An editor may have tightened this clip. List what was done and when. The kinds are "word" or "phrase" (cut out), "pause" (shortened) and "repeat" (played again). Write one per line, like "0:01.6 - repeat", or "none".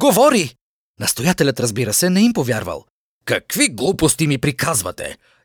0:02.9 - pause